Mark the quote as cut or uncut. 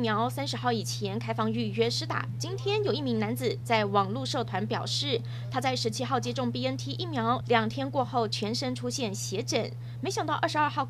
uncut